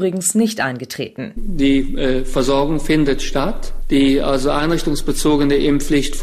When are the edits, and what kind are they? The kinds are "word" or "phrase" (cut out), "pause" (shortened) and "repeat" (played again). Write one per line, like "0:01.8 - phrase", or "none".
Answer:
none